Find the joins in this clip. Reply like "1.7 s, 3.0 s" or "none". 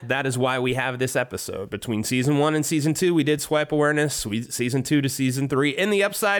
none